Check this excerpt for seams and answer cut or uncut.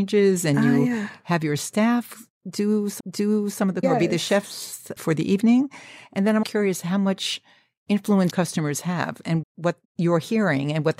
cut